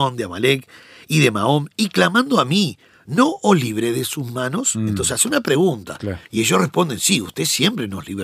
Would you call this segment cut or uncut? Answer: uncut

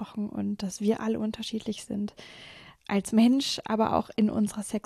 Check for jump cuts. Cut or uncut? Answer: uncut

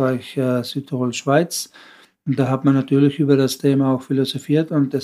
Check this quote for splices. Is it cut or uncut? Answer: uncut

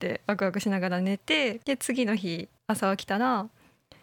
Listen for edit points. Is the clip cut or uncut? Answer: cut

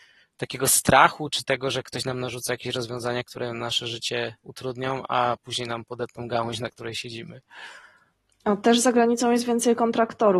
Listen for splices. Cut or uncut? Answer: cut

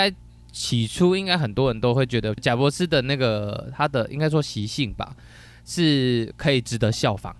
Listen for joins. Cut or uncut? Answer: cut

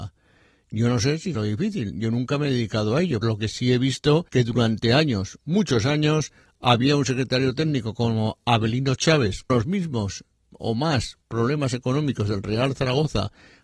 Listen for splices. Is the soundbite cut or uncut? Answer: cut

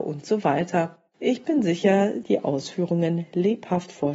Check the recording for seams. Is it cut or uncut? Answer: cut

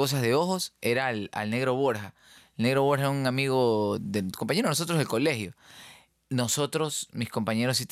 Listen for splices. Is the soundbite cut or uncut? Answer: uncut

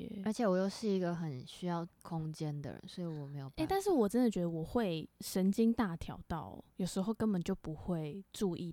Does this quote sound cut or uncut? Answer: cut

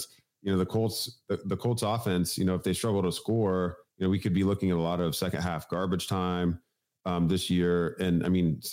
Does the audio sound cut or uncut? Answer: uncut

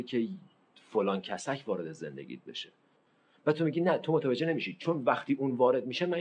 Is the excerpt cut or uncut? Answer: uncut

